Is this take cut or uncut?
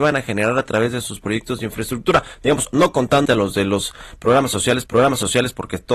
cut